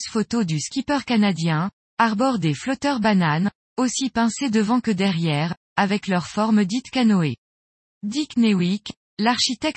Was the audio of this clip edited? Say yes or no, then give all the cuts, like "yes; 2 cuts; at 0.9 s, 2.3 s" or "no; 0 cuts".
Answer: no; 0 cuts